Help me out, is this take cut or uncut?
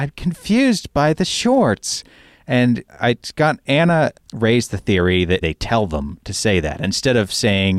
cut